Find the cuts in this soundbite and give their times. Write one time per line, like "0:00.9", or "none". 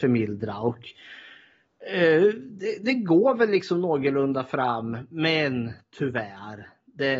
none